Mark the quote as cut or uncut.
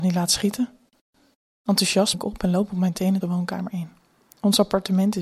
cut